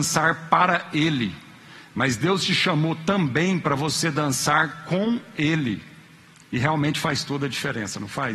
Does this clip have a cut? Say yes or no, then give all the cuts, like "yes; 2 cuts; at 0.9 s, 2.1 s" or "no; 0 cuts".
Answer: no; 0 cuts